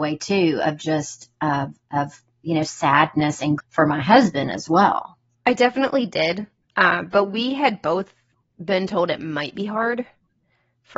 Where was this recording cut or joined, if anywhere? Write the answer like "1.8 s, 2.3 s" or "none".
3.6 s